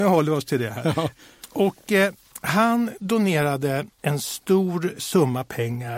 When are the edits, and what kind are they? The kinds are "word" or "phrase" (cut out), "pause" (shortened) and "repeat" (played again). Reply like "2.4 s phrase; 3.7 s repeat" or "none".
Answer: 3.9 s pause; 5.0 s word